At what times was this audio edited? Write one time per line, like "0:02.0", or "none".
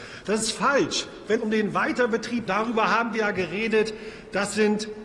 0:01.4
0:02.5
0:03.1